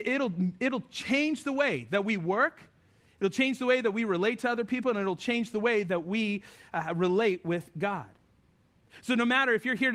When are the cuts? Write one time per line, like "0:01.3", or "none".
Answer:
none